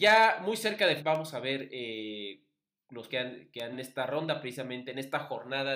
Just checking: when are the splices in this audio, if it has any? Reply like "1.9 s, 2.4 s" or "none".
1.0 s, 3.1 s, 3.7 s